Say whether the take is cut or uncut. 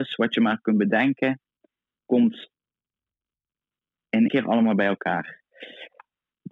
cut